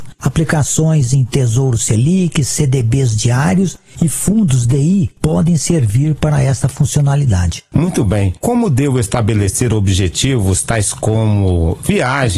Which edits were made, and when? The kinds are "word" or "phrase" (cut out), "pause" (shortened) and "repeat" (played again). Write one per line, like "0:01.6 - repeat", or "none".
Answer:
none

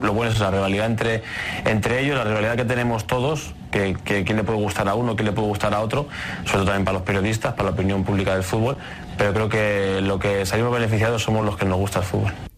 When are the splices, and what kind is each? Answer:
none

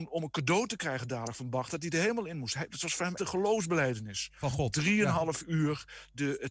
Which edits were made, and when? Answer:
0:03.2 - word

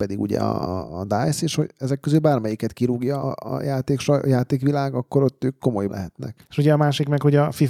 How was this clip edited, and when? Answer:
0:03.2 - word
0:05.9 - word
0:06.4 - pause

